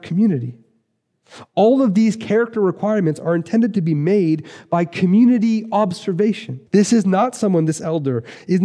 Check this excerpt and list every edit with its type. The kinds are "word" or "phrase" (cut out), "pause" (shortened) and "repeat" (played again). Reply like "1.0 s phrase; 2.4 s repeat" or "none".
6.7 s pause